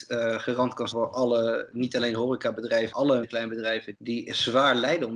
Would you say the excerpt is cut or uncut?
cut